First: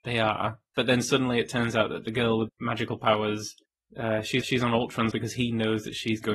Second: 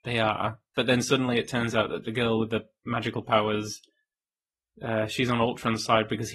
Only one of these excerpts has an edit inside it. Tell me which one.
first; 4 cuts; at 2.5 s, 3.7 s, 4.4 s, 5.1 s

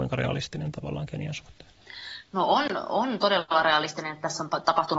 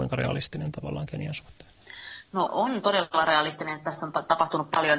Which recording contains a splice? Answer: second; 1 cut; at 2.5 s

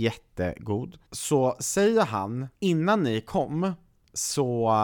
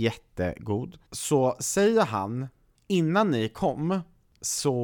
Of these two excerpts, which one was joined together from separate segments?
first; 1 cut; at 2.5 s

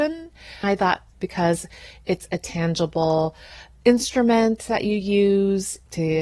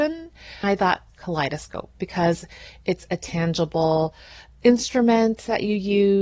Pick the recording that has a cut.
first; 1 cut; at 1.1 s

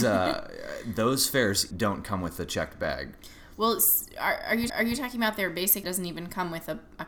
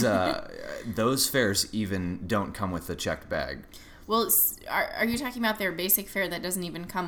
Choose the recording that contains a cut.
first; 3 cuts; at 1.7 s, 4.7 s, 5.8 s

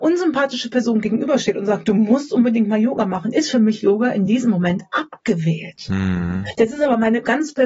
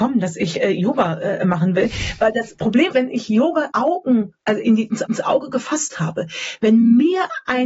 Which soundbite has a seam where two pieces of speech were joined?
second; 4 cuts; at 2.9 s, 3.7 s, 4.4 s, 5.1 s

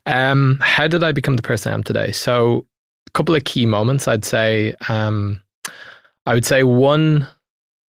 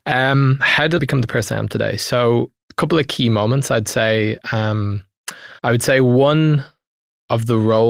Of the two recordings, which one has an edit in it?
second; 3 cuts; at 1.0 s, 2.6 s, 5.6 s

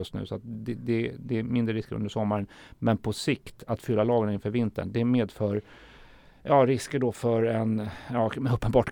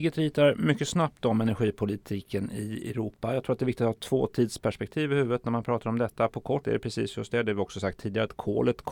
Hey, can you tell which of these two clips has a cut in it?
second; 1 cut; at 6.6 s

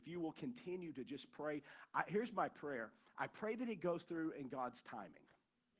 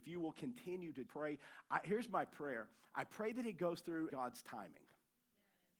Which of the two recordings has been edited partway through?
second; 2 cuts; at 1.1 s, 4.1 s

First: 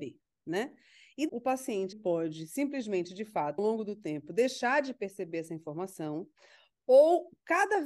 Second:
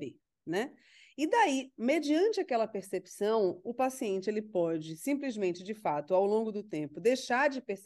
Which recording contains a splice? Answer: first; 3 cuts; at 1.3 s, 1.9 s, 3.6 s

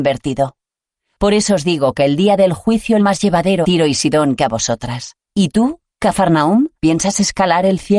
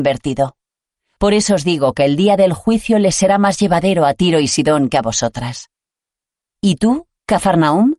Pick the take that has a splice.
first; 4 cuts; at 3.0 s, 3.6 s, 5.2 s, 6.8 s

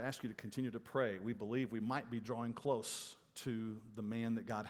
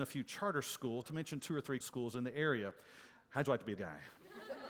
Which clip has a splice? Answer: second; 3 cuts; at 1.0 s, 1.8 s, 3.8 s

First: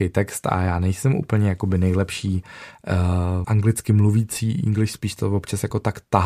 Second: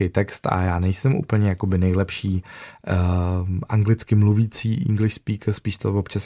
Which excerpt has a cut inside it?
first; 2 cuts; at 3.4 s, 4.9 s

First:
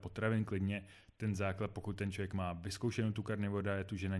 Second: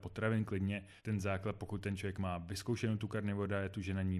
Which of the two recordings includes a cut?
second; 1 cut; at 1.0 s

